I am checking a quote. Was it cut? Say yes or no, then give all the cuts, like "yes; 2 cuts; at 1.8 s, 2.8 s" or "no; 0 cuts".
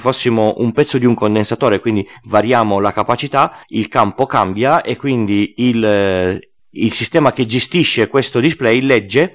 yes; 2 cuts; at 3.6 s, 6.6 s